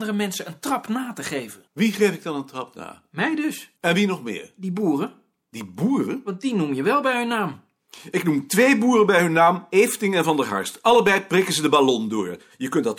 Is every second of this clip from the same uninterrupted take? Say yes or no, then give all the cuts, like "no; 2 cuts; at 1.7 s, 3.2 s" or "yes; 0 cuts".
no; 3 cuts; at 1.7 s, 3.8 s, 5.4 s